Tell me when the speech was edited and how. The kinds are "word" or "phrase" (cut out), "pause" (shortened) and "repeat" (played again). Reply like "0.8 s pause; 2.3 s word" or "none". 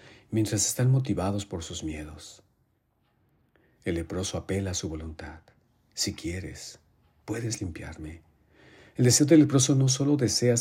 none